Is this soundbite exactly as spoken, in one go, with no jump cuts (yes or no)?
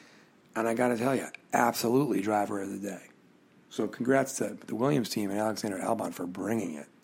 yes